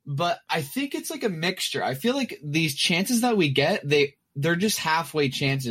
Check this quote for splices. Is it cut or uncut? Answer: uncut